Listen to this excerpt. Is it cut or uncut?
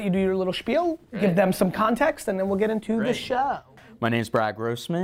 uncut